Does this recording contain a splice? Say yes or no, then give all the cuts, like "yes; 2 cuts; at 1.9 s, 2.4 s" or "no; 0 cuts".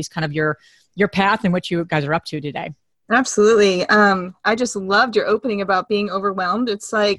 no; 0 cuts